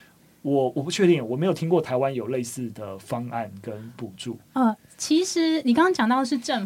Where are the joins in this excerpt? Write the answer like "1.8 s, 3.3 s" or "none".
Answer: none